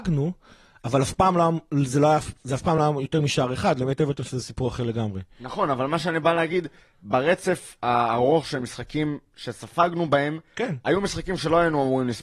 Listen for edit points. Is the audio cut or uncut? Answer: uncut